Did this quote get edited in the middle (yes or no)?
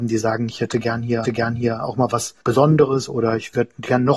yes